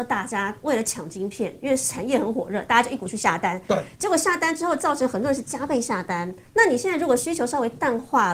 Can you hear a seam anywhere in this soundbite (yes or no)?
yes